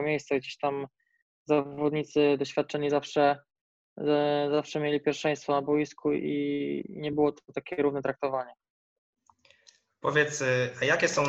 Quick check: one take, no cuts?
yes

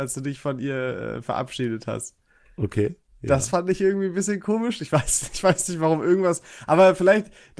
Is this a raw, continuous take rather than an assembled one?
yes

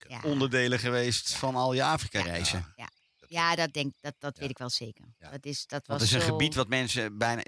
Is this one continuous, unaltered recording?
yes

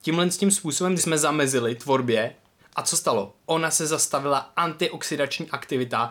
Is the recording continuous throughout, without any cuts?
no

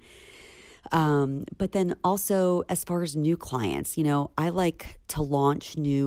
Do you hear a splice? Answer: no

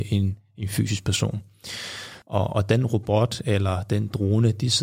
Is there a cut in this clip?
yes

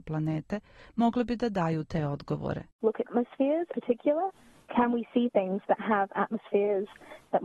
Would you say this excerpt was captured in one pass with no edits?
no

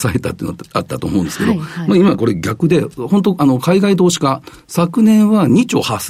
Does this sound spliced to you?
no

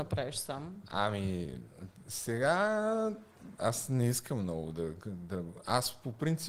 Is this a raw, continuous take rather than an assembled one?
yes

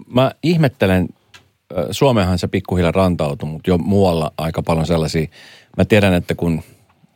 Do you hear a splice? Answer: no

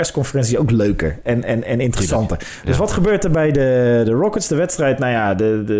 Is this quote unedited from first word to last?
yes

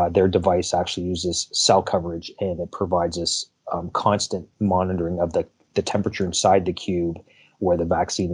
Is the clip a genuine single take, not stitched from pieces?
yes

